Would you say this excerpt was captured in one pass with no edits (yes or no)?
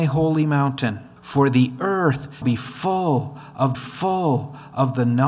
no